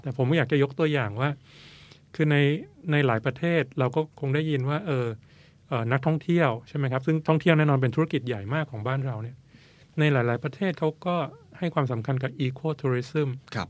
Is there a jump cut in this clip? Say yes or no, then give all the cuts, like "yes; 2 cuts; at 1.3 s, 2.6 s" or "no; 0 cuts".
no; 0 cuts